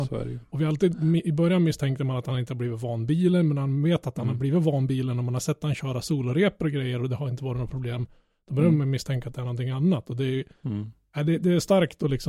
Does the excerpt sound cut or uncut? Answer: uncut